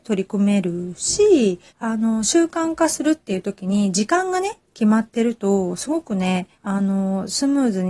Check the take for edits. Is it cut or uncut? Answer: cut